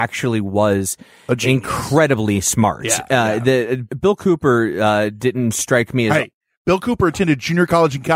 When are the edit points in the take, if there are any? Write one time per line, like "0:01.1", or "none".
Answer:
none